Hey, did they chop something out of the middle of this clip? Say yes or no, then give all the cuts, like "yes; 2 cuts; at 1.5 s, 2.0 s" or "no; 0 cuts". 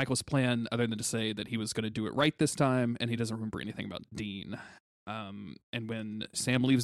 no; 0 cuts